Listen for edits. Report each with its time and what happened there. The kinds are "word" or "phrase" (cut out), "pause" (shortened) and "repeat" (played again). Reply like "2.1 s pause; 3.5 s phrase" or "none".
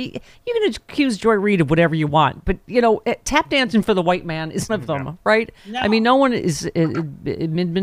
4.7 s phrase